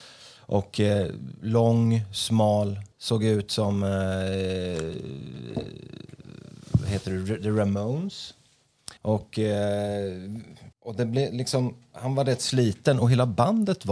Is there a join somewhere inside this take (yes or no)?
yes